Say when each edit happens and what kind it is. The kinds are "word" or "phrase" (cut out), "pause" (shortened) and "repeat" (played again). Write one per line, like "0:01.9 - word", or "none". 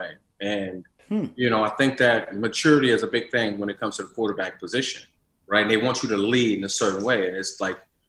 none